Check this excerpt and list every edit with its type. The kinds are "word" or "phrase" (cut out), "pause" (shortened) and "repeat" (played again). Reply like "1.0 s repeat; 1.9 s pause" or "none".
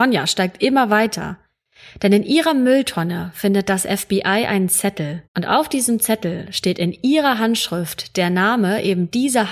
5.3 s pause